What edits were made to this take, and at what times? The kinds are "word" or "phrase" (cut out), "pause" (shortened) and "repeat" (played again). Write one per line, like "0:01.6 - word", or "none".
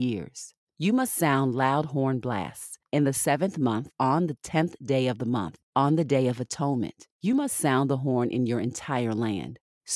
none